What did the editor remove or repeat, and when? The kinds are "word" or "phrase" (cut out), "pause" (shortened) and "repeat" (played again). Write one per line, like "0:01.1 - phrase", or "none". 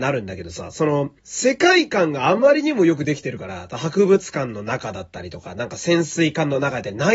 0:01.2 - pause